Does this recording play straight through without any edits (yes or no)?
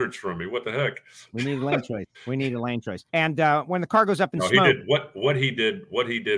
no